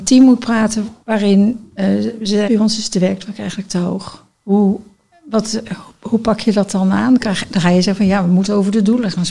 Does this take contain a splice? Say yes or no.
yes